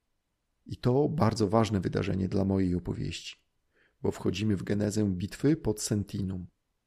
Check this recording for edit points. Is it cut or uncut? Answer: uncut